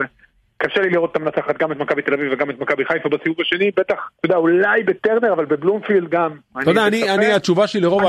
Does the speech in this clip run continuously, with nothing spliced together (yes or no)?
no